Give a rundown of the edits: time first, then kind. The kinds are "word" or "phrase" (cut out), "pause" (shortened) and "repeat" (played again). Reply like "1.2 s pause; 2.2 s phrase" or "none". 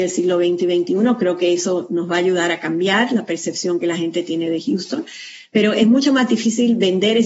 none